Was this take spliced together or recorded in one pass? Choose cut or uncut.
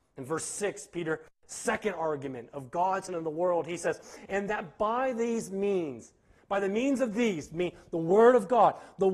cut